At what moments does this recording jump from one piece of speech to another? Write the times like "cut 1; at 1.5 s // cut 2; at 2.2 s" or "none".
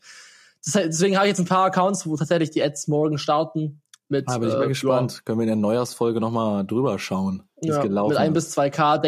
cut 1; at 7.5 s